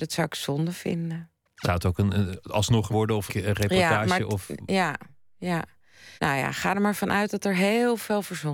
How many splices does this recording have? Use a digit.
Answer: 4